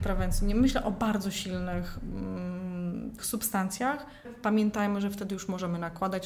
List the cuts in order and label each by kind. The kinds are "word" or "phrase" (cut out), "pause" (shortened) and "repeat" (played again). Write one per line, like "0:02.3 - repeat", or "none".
0:03.2 - word
0:04.2 - word